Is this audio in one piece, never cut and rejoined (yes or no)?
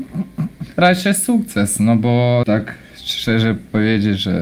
no